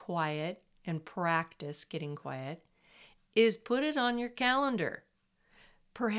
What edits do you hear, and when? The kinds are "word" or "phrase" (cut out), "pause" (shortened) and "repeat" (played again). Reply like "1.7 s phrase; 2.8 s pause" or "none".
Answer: none